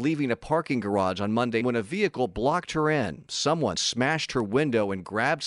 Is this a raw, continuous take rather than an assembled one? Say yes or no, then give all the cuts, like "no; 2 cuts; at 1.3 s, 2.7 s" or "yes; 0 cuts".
no; 2 cuts; at 1.6 s, 3.7 s